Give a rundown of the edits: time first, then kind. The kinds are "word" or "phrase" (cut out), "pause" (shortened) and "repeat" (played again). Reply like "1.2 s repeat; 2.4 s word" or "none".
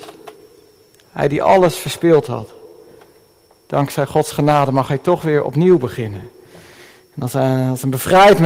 none